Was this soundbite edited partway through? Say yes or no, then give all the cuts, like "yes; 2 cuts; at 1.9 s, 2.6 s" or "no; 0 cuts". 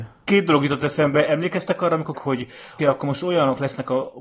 yes; 2 cuts; at 2.1 s, 2.8 s